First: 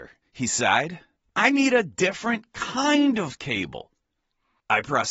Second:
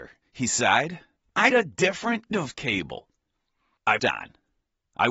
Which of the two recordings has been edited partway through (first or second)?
second